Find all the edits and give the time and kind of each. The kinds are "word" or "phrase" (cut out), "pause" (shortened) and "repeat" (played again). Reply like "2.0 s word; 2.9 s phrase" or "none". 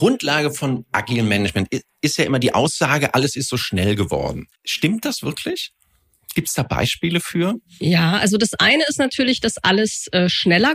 4.5 s pause